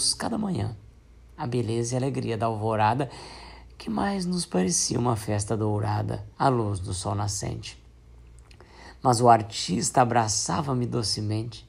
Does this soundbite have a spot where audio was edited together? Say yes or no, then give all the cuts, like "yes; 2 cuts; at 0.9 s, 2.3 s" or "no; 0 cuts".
yes; 1 cut; at 6.3 s